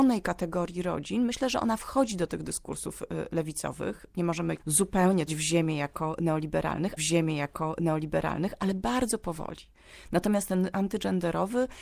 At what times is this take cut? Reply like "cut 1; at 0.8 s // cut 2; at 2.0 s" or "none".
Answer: cut 1; at 4.6 s // cut 2; at 5.3 s // cut 3; at 7.0 s // cut 4; at 10.7 s